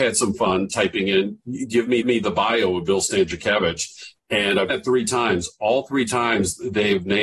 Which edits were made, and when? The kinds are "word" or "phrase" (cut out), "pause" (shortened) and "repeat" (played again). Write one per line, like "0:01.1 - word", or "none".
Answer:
0:02.0 - repeat
0:04.7 - word

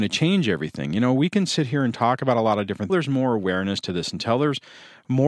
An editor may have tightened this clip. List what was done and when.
0:02.9 - phrase

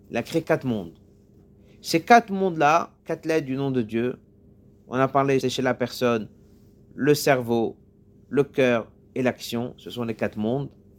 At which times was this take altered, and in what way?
0:03.0 - pause
0:05.4 - word

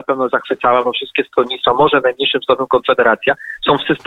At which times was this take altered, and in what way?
none

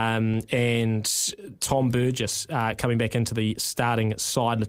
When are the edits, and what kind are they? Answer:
none

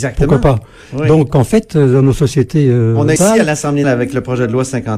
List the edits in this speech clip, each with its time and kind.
0:01.3 - word
0:03.2 - phrase
0:03.8 - word

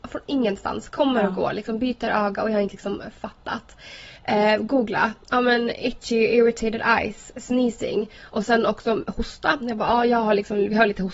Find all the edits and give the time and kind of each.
0:04.2 - pause

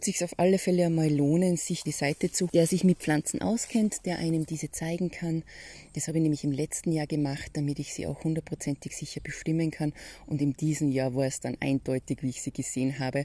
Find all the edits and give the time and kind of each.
0:01.9 - phrase
0:02.5 - word

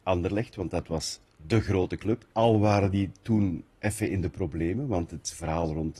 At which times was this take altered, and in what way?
0:02.3 - pause

